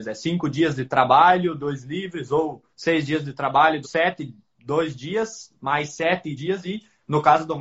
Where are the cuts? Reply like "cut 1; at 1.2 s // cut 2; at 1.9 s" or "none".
cut 1; at 2.7 s // cut 2; at 3.8 s // cut 3; at 6.4 s